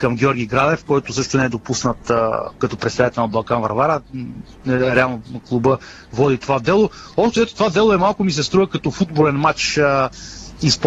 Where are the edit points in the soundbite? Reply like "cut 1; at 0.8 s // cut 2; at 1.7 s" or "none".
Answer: none